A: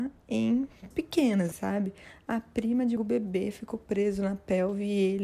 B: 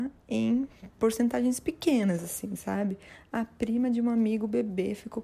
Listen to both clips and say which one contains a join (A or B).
A